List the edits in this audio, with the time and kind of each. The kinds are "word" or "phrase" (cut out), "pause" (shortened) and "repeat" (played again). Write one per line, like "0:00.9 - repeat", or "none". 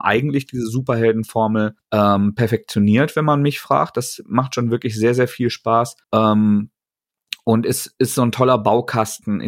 0:01.8 - pause
0:06.0 - pause